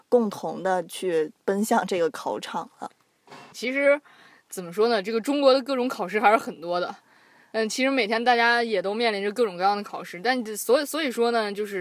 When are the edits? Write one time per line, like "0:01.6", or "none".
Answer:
0:03.5